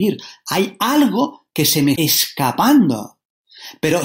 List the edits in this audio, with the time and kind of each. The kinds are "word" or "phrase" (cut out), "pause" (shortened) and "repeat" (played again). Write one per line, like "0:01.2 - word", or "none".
0:02.0 - word